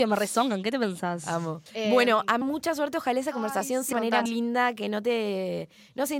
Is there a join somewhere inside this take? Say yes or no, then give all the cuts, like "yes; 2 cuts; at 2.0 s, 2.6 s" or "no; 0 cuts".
yes; 4 cuts; at 1.7 s, 2.4 s, 3.9 s, 4.3 s